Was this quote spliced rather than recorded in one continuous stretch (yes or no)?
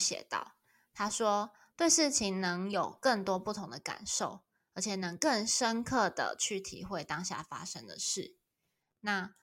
no